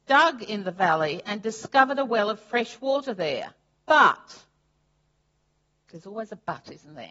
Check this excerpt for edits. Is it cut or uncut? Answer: uncut